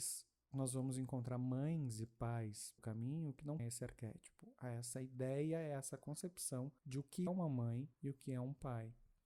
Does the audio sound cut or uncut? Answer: cut